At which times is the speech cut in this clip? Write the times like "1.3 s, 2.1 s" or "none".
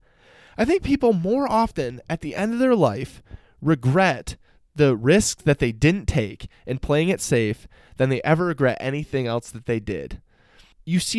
none